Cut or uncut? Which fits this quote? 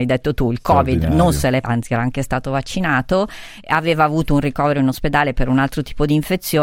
cut